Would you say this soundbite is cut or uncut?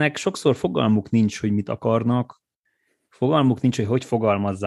uncut